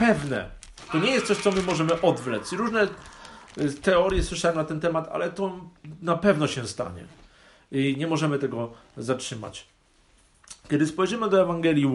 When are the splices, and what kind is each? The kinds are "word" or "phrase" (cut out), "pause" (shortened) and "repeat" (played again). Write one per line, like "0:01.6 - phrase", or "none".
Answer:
none

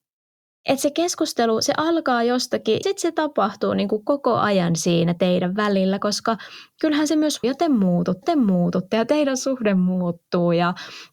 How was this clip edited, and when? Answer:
0:02.8 - word
0:07.4 - phrase
0:08.2 - repeat

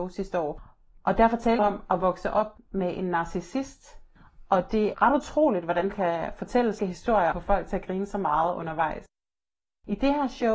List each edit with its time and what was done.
0:01.6 - word
0:04.9 - word
0:05.9 - word
0:06.8 - word
0:07.3 - word

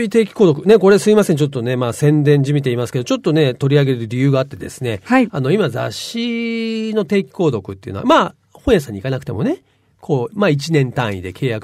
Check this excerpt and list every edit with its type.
none

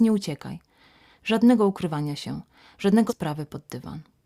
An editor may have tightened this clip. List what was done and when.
0:03.1 - word

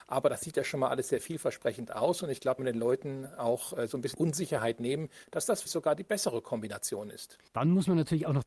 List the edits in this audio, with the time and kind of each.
0:02.6 - phrase
0:04.1 - word
0:05.7 - word
0:07.5 - pause

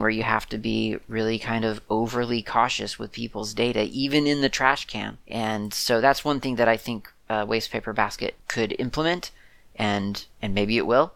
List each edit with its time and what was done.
none

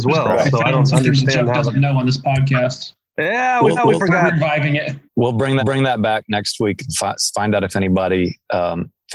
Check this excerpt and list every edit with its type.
0:03.8 - repeat
0:05.1 - pause
0:05.6 - repeat

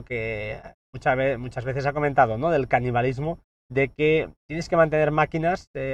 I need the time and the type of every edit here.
0:03.5 - pause

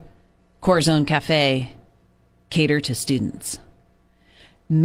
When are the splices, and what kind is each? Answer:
none

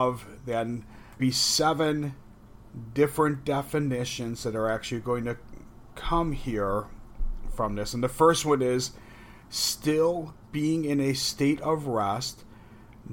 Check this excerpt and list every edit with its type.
0:01.2 - phrase

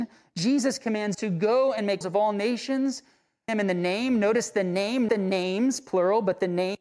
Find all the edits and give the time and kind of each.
0:01.1 - word
0:02.0 - word
0:03.5 - word
0:05.1 - word

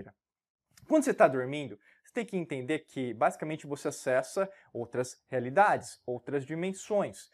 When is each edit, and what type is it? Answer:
none

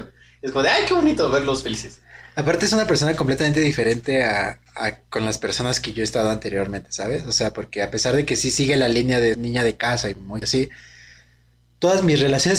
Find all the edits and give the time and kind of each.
0:09.3 - word
0:10.4 - phrase

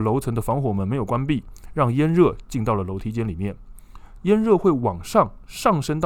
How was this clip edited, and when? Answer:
0:04.2 - phrase

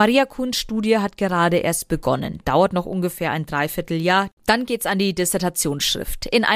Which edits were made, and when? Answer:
none

